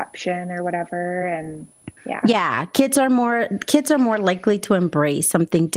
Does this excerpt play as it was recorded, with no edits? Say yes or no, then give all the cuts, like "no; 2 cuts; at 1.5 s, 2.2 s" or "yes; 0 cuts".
yes; 0 cuts